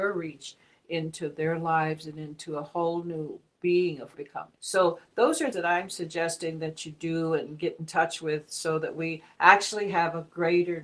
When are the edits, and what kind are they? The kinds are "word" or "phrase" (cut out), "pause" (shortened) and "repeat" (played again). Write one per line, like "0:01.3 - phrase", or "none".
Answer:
0:04.1 - phrase
0:04.6 - pause
0:05.5 - word